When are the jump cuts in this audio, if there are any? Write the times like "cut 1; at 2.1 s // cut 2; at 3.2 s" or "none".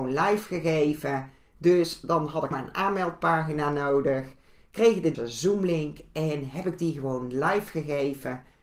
cut 1; at 2.5 s // cut 2; at 5.1 s